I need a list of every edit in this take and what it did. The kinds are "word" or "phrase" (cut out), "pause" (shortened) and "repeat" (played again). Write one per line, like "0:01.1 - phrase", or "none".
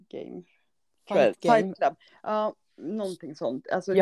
0:02.1 - pause